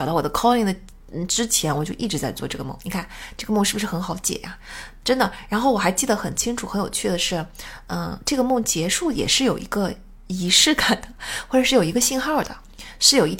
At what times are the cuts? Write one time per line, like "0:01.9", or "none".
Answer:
none